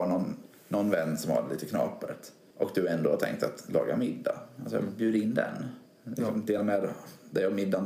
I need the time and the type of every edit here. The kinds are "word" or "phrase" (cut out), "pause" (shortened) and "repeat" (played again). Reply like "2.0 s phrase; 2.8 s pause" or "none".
none